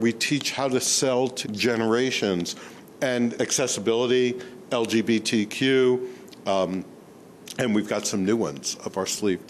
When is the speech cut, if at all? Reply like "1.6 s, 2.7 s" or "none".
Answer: 1.4 s, 3.4 s

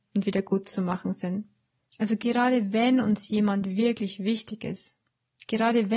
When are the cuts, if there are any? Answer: 1.8 s

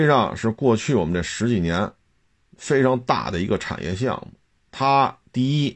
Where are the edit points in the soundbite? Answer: 2.3 s

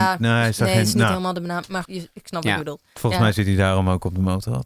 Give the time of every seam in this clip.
1.8 s

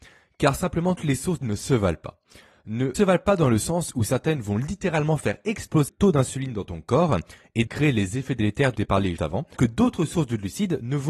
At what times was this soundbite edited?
1.0 s, 1.4 s, 2.9 s, 5.9 s, 7.7 s, 8.7 s, 9.2 s, 9.6 s

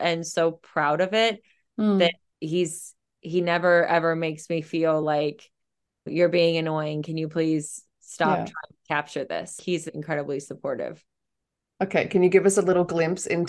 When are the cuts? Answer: none

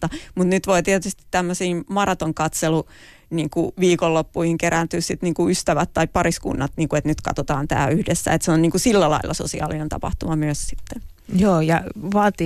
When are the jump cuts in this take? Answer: none

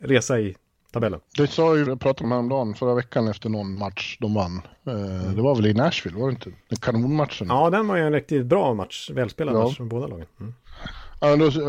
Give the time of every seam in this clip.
1.3 s, 1.9 s, 2.2 s, 6.6 s

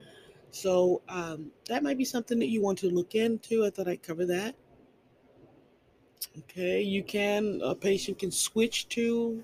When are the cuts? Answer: none

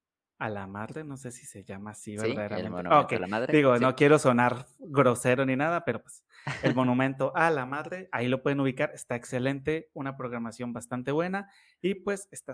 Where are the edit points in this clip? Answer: none

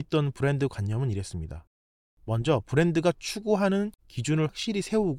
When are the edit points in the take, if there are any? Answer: 4.0 s

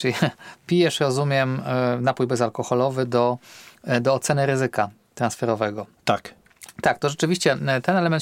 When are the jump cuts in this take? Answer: none

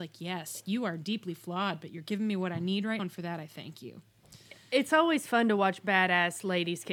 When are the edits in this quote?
3.0 s

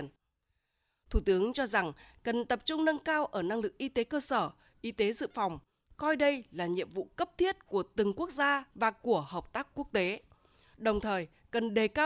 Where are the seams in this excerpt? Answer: none

